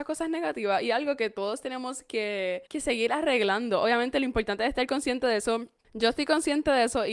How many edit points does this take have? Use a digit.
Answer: 1